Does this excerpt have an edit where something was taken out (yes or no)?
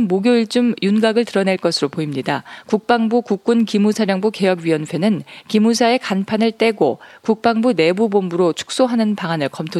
no